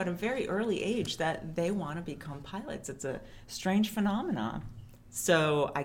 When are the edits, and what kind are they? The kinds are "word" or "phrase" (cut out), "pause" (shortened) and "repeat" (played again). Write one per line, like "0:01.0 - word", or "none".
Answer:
none